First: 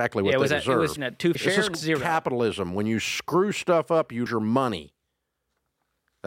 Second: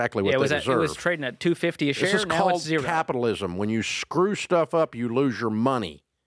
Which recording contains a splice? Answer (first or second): first